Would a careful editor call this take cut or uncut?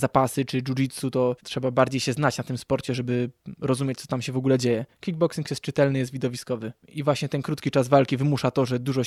uncut